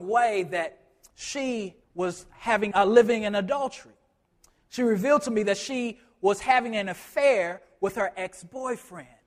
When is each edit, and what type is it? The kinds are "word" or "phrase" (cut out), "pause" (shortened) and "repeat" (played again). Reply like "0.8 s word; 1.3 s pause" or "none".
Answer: 1.8 s pause; 2.7 s word